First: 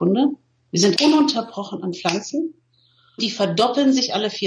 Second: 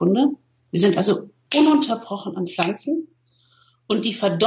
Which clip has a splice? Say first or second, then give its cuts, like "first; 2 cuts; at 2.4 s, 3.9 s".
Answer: first; 2 cuts; at 0.9 s, 3.2 s